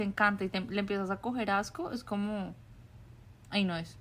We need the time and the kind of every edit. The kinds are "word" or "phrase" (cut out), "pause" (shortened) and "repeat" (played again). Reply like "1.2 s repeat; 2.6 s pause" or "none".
none